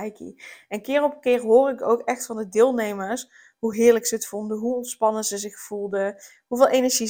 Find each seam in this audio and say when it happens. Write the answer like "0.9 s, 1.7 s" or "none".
none